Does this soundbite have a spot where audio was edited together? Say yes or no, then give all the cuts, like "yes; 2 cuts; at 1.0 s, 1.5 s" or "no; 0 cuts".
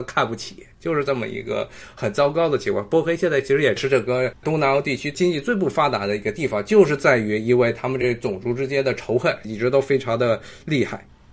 yes; 1 cut; at 4.4 s